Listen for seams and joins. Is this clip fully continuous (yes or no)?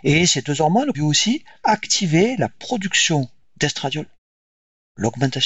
no